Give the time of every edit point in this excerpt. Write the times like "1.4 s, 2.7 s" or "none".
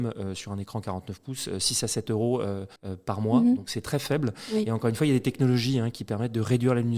2.8 s